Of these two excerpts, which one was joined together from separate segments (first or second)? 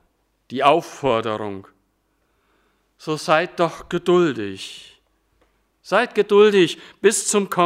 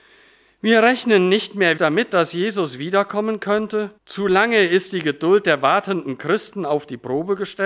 second